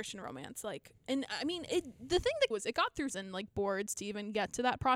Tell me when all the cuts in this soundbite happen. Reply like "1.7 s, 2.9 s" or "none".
1.0 s, 2.5 s, 3.1 s